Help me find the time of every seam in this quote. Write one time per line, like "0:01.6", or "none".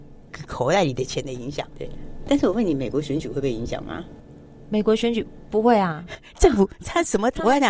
0:01.7